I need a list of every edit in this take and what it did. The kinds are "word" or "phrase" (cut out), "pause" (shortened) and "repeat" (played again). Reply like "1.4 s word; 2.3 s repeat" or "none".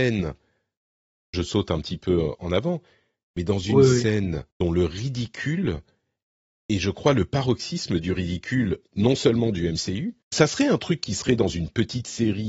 4.5 s pause; 10.2 s pause